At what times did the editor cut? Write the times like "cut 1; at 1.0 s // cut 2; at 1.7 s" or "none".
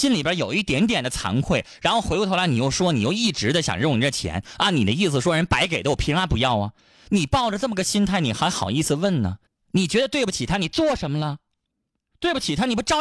cut 1; at 9.5 s